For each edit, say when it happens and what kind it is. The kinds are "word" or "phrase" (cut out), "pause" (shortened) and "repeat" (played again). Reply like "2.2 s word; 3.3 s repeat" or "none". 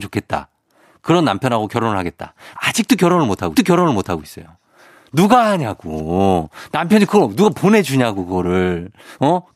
3.6 s repeat